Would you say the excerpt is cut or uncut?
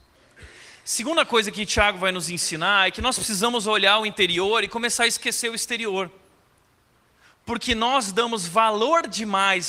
uncut